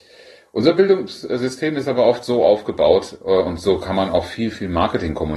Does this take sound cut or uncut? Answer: uncut